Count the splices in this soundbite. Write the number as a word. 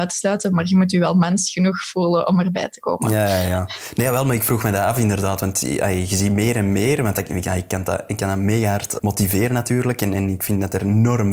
one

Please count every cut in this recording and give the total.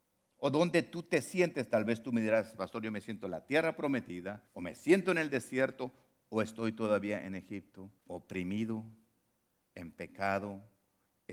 two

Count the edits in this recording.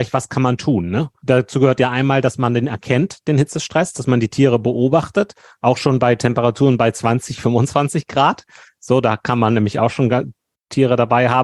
zero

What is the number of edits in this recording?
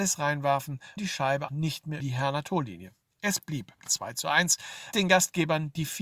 five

